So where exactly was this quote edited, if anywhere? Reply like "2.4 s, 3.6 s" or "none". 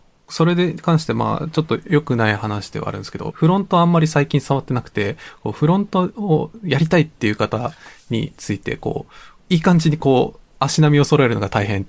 3.3 s